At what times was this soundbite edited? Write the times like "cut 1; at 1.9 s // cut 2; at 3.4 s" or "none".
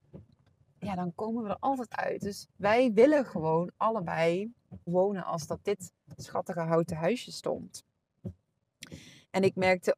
cut 1; at 2.5 s // cut 2; at 4.9 s